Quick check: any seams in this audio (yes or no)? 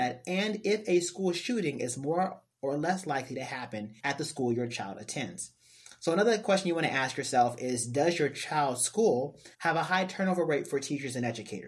yes